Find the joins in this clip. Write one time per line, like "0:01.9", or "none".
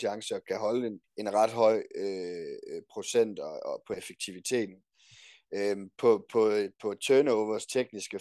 none